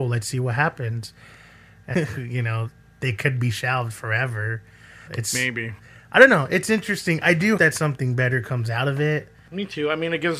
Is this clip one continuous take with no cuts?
no; 3 cuts; at 1.9 s, 5.1 s, 7.6 s

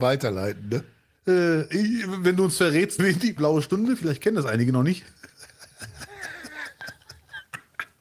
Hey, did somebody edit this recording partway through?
yes; 2 cuts; at 3.0 s, 3.4 s

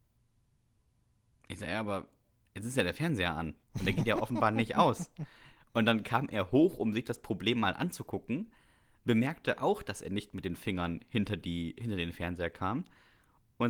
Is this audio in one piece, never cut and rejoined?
no; 1 cut; at 3.6 s

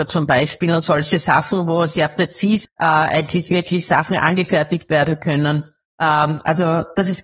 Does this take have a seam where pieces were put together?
yes; 1 cut; at 2.6 s

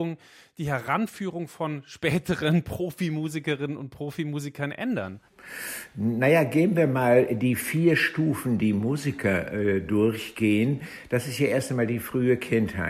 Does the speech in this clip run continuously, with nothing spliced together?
yes; 0 cuts

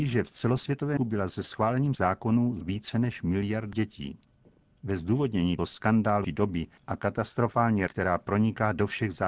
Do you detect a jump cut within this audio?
yes; 7 cuts; at 1.0 s, 1.9 s, 2.6 s, 3.7 s, 5.6 s, 6.2 s, 7.9 s

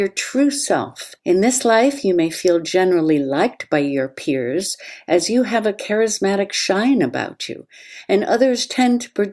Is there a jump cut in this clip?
yes; 1 cut; at 1.2 s

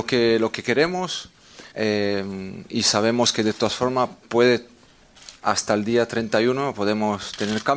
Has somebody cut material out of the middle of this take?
yes; 1 cut; at 1.7 s

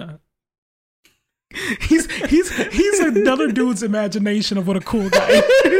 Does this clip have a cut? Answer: no; 0 cuts

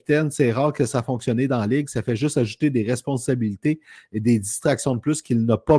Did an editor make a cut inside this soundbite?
no; 0 cuts

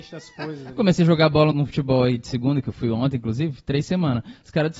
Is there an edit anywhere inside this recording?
yes; 1 cut; at 1.5 s

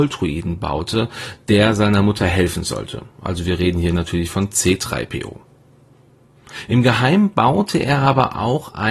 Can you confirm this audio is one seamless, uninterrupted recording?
yes; 0 cuts

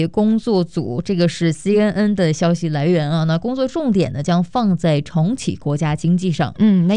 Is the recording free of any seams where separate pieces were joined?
yes; 0 cuts

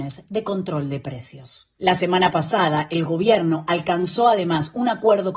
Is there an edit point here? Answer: no; 0 cuts

